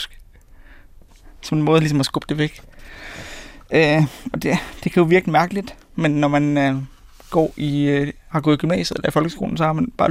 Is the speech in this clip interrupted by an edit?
no; 0 cuts

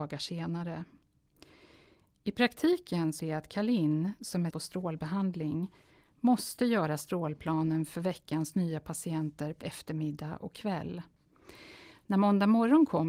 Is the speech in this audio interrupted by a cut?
yes; 3 cuts; at 3.2 s, 4.5 s, 9.6 s

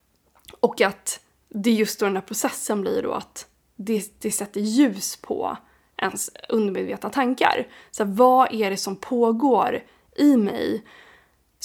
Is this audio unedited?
yes; 0 cuts

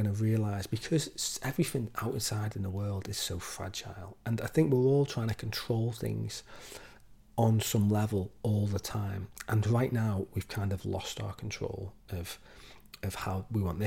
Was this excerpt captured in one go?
yes; 0 cuts

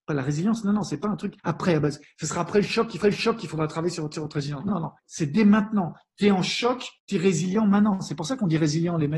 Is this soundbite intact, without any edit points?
no; 6 cuts; at 1.4 s, 3.0 s, 4.1 s, 4.7 s, 5.0 s, 7.0 s

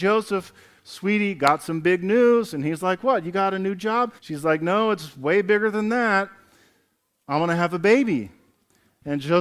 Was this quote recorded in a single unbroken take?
no; 1 cut; at 4.2 s

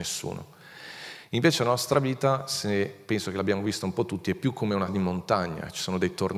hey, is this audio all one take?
no; 1 cut; at 4.9 s

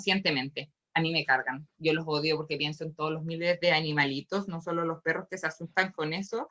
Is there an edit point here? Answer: no; 0 cuts

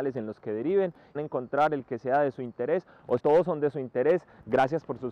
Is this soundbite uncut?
no; 2 cuts; at 1.1 s, 3.2 s

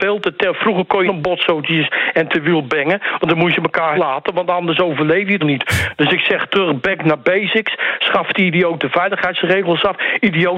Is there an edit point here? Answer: yes; 3 cuts; at 1.0 s, 3.9 s, 5.4 s

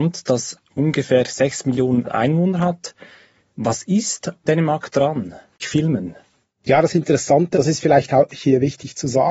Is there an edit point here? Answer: yes; 4 cuts; at 2.0 s, 4.5 s, 5.6 s, 7.5 s

